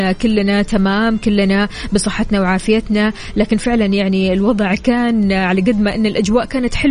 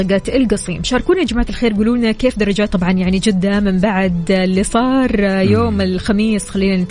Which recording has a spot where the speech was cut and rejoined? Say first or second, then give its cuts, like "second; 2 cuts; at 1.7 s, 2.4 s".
second; 1 cut; at 2.7 s